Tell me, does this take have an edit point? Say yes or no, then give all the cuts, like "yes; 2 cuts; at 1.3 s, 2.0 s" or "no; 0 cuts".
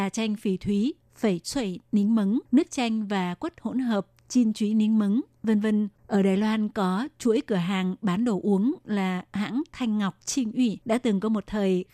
yes; 3 cuts; at 2.5 s, 6.0 s, 10.8 s